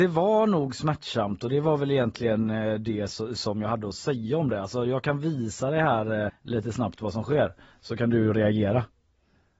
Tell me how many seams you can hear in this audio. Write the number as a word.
one